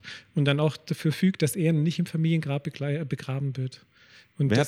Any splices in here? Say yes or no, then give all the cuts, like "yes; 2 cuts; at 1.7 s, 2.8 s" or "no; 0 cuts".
no; 0 cuts